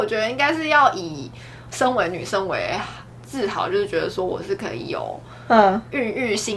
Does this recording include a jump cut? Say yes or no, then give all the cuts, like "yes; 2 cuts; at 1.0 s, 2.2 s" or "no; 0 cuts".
no; 0 cuts